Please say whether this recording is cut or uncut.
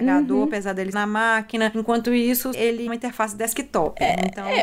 cut